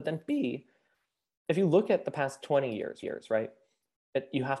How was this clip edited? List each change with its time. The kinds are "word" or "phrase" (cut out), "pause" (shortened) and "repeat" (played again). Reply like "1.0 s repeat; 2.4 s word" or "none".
3.0 s repeat

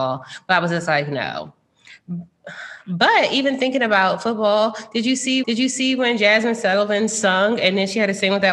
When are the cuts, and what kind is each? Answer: 5.4 s repeat

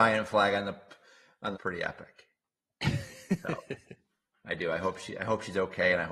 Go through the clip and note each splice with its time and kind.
1.5 s phrase

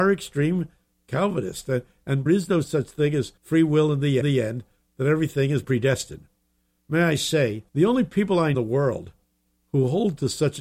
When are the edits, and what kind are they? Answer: 2.3 s phrase; 3.4 s pause; 4.2 s repeat; 5.6 s word; 7.7 s pause; 8.5 s phrase

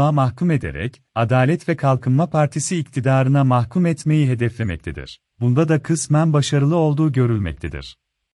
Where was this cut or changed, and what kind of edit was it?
5.3 s pause

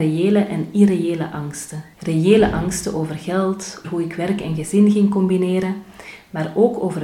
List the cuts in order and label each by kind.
1.9 s pause; 3.8 s word

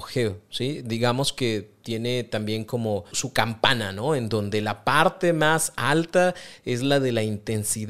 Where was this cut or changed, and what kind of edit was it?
3.1 s word

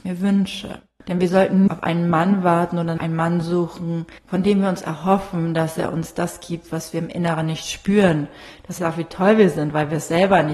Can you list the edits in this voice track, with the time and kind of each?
1.7 s word; 3.0 s word; 4.2 s pause; 8.8 s phrase

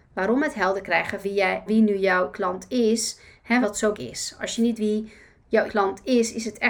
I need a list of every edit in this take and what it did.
1.2 s word; 1.7 s word; 2.3 s word; 3.6 s word; 3.9 s word; 4.8 s word; 5.7 s word

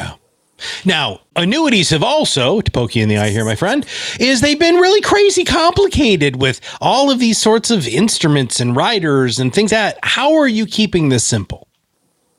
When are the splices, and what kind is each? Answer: 9.7 s word

